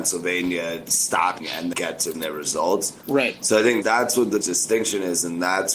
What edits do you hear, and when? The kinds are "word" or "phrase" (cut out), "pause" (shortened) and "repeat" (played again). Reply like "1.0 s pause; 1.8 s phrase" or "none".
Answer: 1.4 s word; 1.7 s word; 2.1 s word; 3.8 s word; 4.4 s word